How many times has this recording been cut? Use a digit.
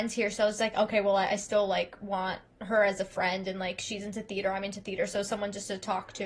0